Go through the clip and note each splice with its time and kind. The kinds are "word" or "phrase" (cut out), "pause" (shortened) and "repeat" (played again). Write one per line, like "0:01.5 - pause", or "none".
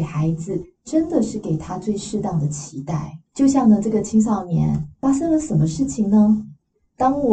0:03.3 - pause